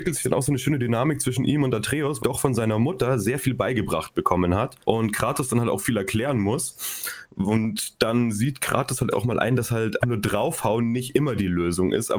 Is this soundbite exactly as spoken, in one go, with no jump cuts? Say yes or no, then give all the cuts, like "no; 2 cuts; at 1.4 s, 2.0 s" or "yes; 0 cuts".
no; 4 cuts; at 2.2 s, 4.8 s, 9.1 s, 10.0 s